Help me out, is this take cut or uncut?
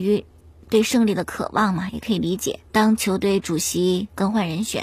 cut